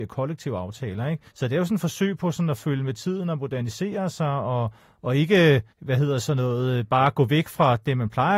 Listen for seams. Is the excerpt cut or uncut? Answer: cut